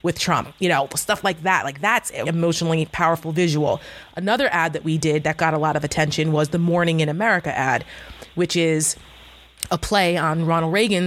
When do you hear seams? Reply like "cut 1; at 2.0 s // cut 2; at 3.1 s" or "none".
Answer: cut 1; at 2.2 s